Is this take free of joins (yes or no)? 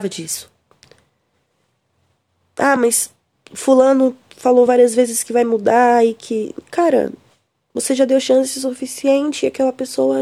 yes